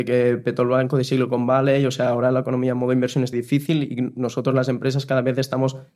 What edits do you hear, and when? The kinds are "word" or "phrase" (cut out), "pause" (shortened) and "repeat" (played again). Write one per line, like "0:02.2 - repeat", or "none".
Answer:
0:03.3 - word